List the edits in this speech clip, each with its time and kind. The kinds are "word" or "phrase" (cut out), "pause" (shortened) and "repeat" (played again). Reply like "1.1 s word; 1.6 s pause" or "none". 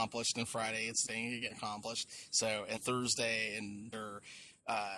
1.1 s word; 1.5 s word; 2.8 s word; 3.9 s word